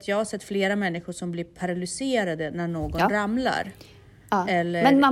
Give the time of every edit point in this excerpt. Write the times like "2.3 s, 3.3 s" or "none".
none